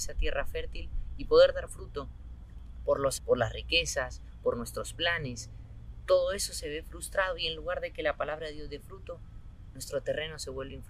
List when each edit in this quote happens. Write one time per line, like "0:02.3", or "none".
0:01.7
0:03.2